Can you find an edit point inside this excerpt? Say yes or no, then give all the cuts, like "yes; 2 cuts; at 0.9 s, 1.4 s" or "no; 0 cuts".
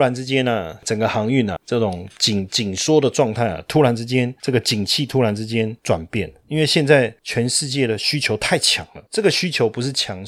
yes; 1 cut; at 1.6 s